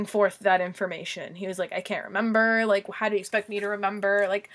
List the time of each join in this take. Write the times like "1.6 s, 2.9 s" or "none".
none